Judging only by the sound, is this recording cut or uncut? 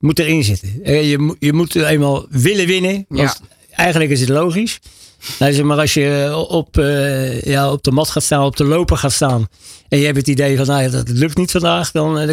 uncut